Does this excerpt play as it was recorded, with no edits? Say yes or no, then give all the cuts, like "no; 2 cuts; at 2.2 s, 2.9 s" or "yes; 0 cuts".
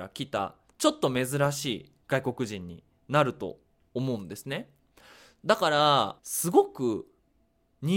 no; 2 cuts; at 2.0 s, 6.2 s